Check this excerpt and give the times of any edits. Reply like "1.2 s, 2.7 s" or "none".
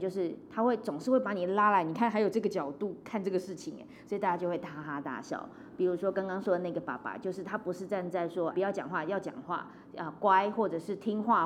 8.5 s